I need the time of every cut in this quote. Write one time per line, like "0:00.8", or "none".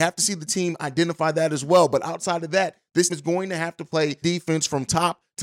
0:03.1
0:04.2